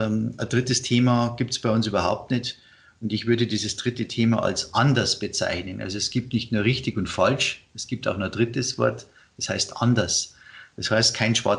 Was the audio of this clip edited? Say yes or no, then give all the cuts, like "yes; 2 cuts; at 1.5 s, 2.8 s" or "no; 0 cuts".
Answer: no; 0 cuts